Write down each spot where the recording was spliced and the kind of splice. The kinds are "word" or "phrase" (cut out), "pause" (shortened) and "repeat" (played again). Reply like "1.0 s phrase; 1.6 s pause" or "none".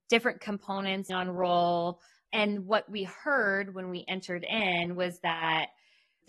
1.1 s word